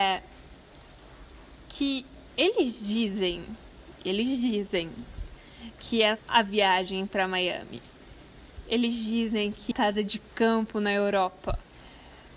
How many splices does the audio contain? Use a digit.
2